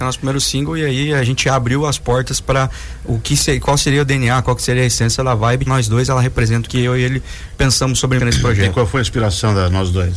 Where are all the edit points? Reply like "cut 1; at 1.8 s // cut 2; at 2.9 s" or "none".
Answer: cut 1; at 5.7 s // cut 2; at 6.7 s // cut 3; at 8.2 s